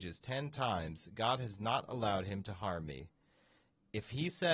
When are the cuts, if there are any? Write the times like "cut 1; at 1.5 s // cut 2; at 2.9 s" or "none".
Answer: none